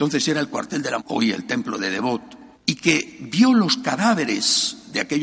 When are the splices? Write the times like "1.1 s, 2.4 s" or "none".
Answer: 1.0 s, 2.5 s